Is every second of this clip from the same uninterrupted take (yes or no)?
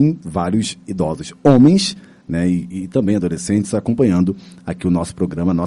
yes